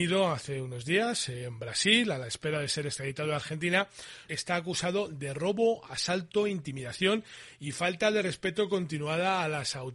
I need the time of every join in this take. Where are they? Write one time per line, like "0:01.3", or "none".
0:04.3